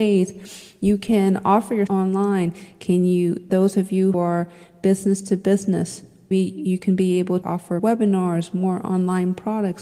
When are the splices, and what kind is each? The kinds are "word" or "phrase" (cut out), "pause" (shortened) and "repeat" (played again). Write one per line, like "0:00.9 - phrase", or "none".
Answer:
0:01.9 - word
0:03.5 - word
0:04.1 - word
0:06.3 - word
0:07.4 - word
0:07.8 - word